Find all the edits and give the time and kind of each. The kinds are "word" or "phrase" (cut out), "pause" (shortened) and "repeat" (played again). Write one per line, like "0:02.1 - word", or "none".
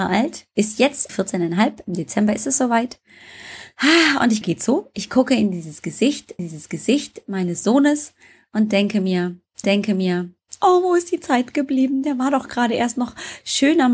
0:01.1 - word
0:04.4 - phrase
0:06.4 - repeat
0:09.6 - repeat